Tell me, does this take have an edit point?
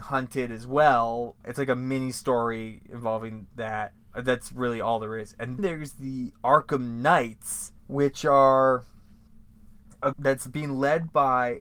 yes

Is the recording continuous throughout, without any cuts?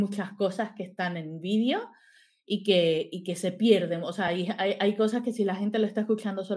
yes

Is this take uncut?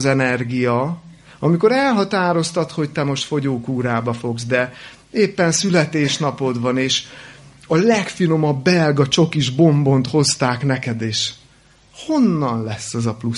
yes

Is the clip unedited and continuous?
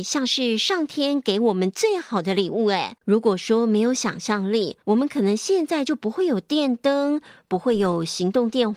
no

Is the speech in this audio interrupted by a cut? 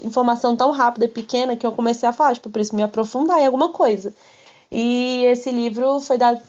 no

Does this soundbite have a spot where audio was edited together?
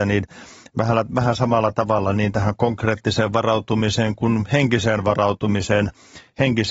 no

